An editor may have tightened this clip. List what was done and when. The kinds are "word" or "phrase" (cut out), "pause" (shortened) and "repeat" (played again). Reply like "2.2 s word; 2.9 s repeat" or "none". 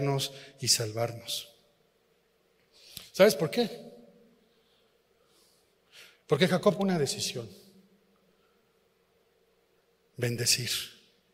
6.8 s word